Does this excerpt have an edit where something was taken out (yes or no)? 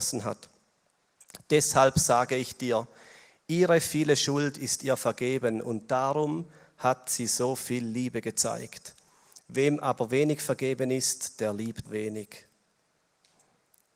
yes